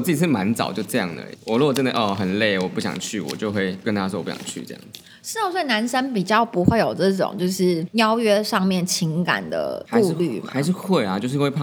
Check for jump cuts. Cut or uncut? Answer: uncut